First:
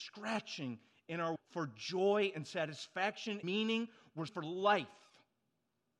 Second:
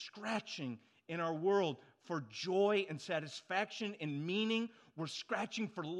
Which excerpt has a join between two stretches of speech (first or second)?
first